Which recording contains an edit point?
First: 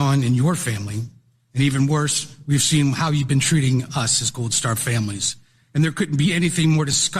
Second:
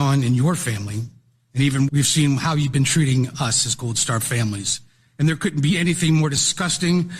second; 1 cut; at 1.9 s

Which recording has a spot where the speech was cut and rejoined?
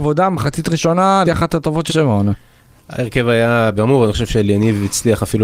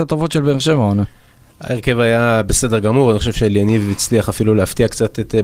first; 3 cuts; at 1.3 s, 1.9 s, 3.8 s

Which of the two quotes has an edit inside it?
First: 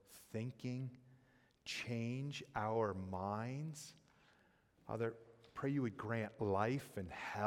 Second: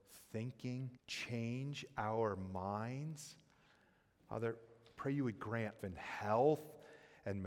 second; 2 cuts; at 1.0 s, 5.8 s

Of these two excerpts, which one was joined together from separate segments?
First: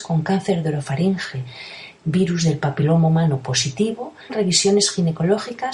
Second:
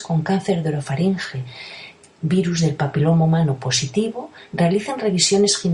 first; 2 cuts; at 2.0 s, 4.3 s

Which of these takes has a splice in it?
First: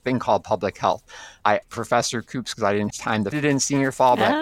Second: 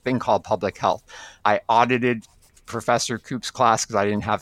first; 4 cuts; at 1.6 s, 2.5 s, 2.9 s, 3.3 s

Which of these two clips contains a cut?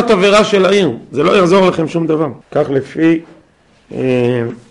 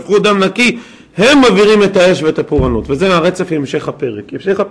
first; 1 cut; at 2.4 s

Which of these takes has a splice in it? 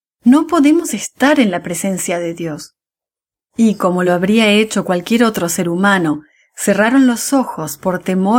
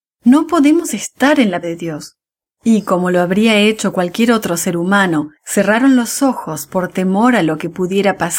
second; 3 cuts; at 1.6 s, 2.4 s, 5.4 s

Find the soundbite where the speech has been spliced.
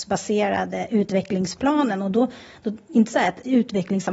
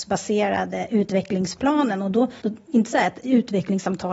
second; 1 cut; at 2.4 s

